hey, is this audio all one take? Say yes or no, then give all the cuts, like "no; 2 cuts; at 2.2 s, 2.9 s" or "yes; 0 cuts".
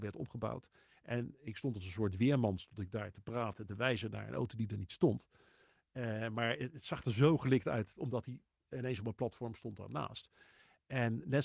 yes; 0 cuts